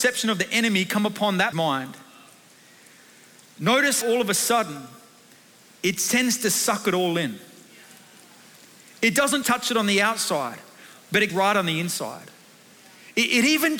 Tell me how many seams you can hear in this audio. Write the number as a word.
four